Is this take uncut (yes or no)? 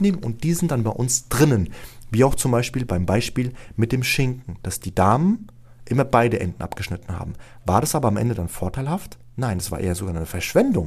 yes